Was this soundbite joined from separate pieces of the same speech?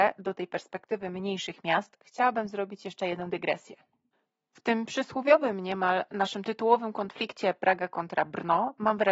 no; 0 cuts

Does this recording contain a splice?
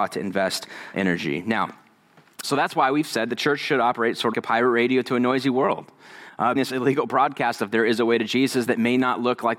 yes; 4 cuts; at 0.9 s, 2.4 s, 4.3 s, 6.6 s

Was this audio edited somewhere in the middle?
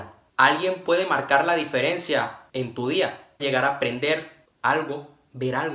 yes; 1 cut; at 3.4 s

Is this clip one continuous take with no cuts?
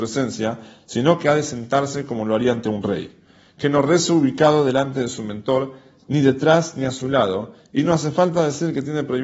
yes; 0 cuts

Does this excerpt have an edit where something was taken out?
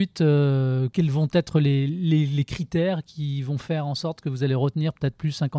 no; 0 cuts

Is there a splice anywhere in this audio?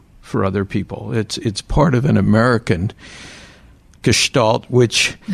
no; 0 cuts

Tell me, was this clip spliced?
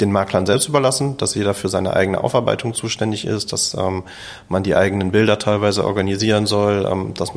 no; 0 cuts

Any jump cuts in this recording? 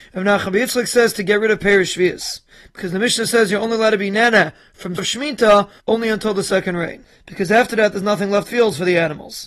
yes; 2 cuts; at 5.0 s, 8.5 s

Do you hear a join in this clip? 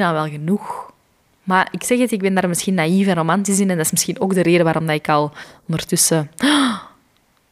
no; 0 cuts

